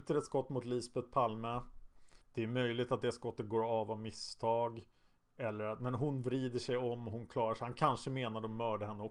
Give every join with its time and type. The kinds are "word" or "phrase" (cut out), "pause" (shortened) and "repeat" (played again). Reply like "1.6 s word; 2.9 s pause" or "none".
2.2 s pause